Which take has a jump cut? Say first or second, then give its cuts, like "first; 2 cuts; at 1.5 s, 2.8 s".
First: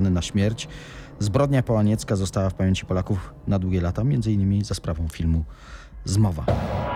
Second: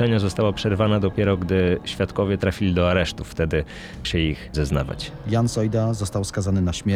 second; 2 cuts; at 4.0 s, 4.5 s